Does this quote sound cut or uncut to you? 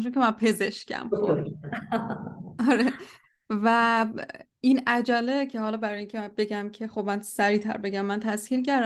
uncut